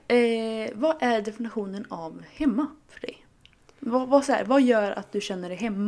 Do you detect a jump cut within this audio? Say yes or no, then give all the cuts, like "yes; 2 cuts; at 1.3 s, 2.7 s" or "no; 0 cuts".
no; 0 cuts